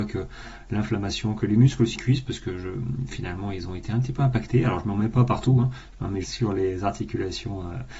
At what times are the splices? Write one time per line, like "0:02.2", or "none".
0:01.9
0:06.2